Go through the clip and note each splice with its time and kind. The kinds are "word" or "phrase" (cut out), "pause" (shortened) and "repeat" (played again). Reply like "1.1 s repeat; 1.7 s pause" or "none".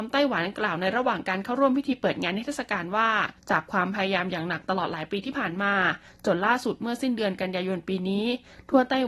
3.4 s pause